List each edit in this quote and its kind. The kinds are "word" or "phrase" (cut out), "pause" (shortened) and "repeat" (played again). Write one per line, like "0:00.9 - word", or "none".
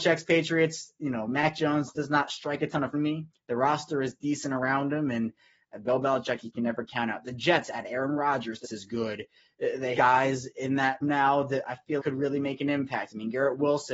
0:02.9 - word
0:03.3 - word
0:08.6 - word
0:10.0 - word
0:11.0 - word
0:12.0 - word